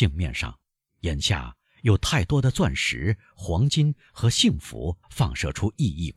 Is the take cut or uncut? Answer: cut